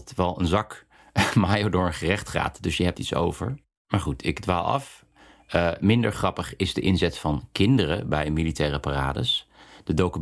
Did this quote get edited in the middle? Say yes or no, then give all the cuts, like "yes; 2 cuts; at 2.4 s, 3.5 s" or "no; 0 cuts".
yes; 1 cut; at 2.9 s